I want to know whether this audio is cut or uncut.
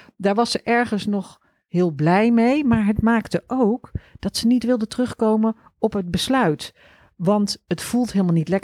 uncut